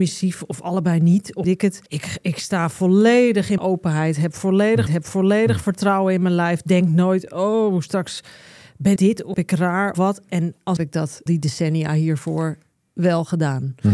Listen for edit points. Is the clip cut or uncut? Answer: cut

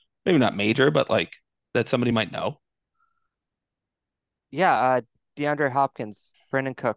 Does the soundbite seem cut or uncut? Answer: uncut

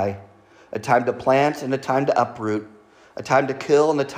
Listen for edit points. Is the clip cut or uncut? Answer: uncut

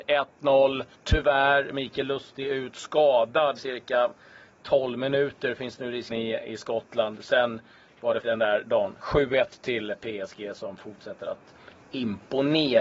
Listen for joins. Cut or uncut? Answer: cut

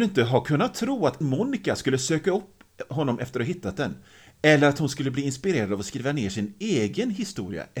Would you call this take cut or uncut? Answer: cut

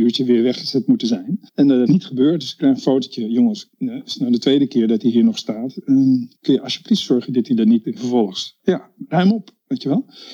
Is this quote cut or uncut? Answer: cut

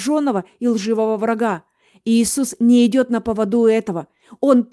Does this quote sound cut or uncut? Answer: uncut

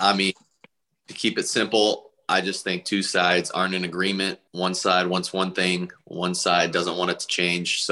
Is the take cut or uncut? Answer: cut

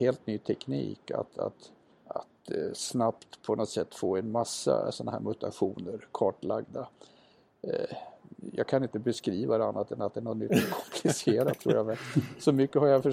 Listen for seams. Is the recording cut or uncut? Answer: cut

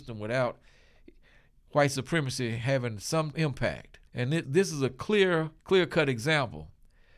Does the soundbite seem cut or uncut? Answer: cut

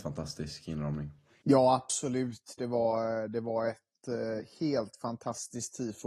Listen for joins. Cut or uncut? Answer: uncut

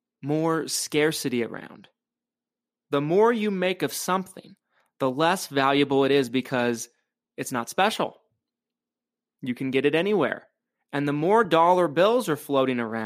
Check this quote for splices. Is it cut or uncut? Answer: uncut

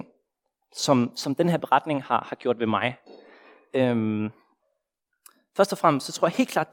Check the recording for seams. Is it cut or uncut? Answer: uncut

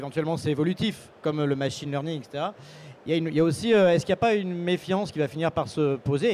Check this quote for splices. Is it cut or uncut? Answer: uncut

